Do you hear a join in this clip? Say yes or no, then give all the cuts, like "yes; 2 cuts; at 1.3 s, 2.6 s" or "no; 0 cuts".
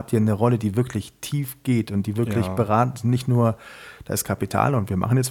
no; 0 cuts